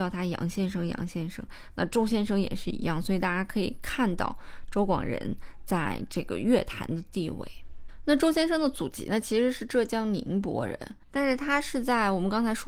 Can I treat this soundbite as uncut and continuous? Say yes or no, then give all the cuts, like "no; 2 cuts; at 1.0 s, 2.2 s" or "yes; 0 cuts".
no; 1 cut; at 11.0 s